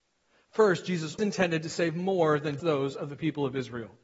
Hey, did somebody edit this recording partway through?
yes; 2 cuts; at 1.2 s, 2.6 s

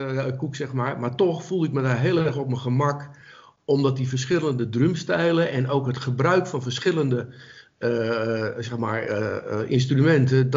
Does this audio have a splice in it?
no; 0 cuts

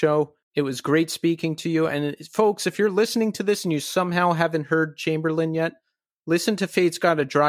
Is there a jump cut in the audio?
no; 0 cuts

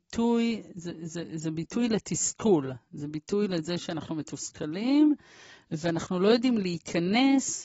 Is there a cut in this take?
no; 0 cuts

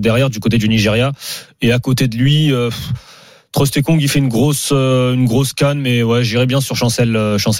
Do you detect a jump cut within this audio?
no; 0 cuts

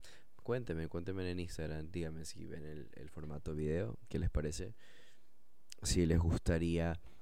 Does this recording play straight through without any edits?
yes; 0 cuts

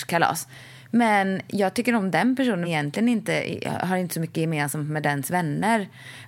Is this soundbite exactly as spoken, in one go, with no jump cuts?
no; 1 cut; at 2.6 s

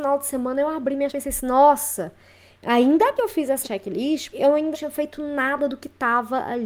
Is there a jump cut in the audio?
yes; 5 cuts; at 1.1 s, 3.2 s, 3.6 s, 4.3 s, 4.7 s

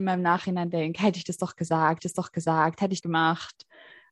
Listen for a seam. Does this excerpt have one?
yes; 2 cuts; at 2.0 s, 3.0 s

